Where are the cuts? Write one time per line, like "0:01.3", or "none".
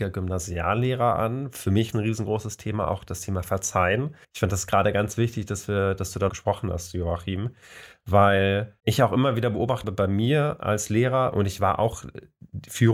0:01.9
0:04.2
0:06.3
0:08.8
0:09.8